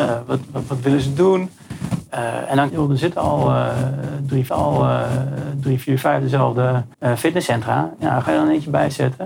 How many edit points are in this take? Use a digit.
4